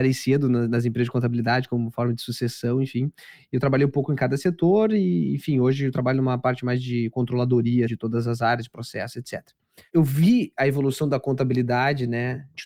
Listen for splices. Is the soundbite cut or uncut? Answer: cut